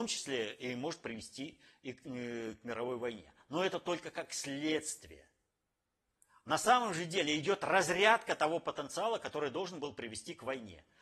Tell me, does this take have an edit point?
no; 0 cuts

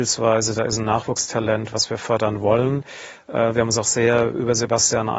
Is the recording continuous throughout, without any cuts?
yes; 0 cuts

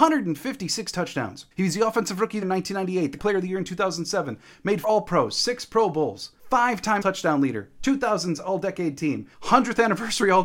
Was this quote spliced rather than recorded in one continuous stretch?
yes; 7 cuts; at 1.5 s, 2.4 s, 3.2 s, 4.8 s, 6.4 s, 7.0 s, 9.3 s

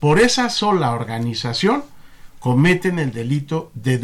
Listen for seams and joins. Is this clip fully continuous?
yes; 0 cuts

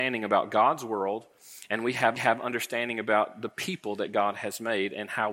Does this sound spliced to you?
yes; 1 cut; at 2.2 s

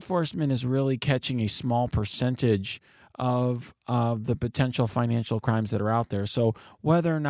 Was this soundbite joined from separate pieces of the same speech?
no; 0 cuts

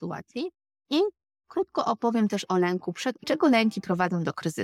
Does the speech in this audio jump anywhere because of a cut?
yes; 1 cut; at 3.2 s

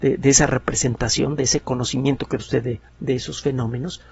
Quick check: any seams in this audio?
yes; 2 cuts; at 2.4 s, 2.9 s

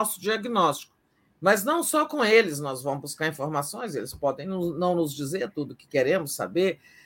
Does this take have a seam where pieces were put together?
no; 0 cuts

